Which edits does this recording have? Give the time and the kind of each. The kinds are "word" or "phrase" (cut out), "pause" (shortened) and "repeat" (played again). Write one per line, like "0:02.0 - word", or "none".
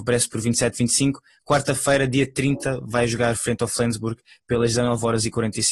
none

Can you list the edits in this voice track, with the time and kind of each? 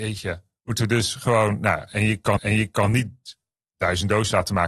0:02.4 - repeat

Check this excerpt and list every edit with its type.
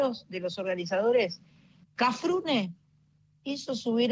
none

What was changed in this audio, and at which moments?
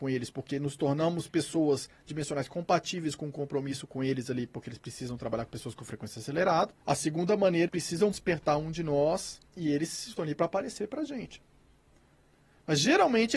0:06.8 - pause
0:07.7 - word
0:08.1 - word
0:09.5 - pause
0:10.2 - word

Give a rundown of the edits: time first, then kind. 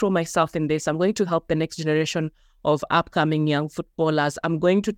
none

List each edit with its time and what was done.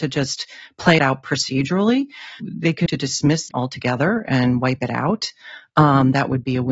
0:01.0 - word
0:02.4 - word
0:02.9 - word
0:03.5 - word

